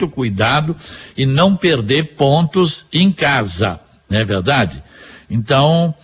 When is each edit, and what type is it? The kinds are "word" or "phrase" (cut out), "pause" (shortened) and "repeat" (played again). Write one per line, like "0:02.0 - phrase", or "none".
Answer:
none